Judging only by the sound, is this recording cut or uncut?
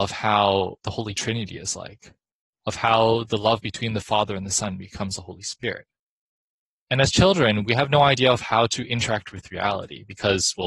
uncut